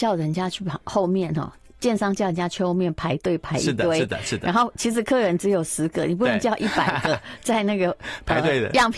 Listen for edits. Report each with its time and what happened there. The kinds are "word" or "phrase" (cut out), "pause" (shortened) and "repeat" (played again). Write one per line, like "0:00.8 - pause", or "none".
none